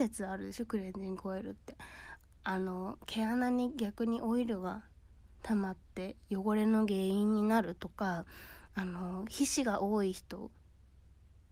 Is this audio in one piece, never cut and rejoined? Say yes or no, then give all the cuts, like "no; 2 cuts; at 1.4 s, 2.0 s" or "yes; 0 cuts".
yes; 0 cuts